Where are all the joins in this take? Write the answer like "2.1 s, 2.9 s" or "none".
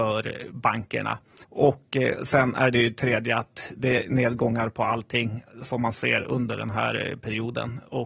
1.4 s